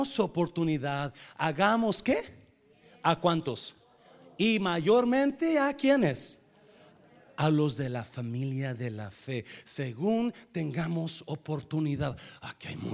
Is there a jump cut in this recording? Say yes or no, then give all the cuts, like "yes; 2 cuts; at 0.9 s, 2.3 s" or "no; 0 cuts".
no; 0 cuts